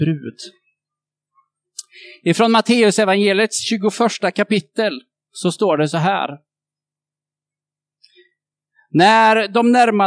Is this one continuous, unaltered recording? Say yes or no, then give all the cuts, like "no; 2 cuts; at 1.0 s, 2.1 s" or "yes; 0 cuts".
yes; 0 cuts